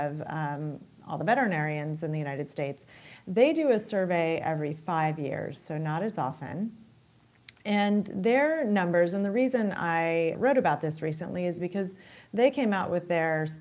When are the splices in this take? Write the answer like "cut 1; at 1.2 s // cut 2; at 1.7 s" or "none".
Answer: cut 1; at 10.3 s